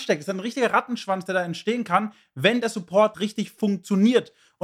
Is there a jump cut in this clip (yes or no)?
yes